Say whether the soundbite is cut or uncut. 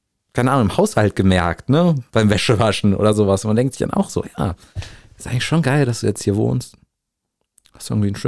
uncut